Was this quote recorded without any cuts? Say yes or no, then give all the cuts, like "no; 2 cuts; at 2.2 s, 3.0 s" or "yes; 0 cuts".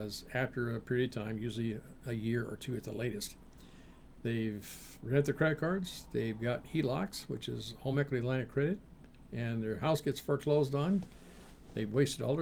yes; 0 cuts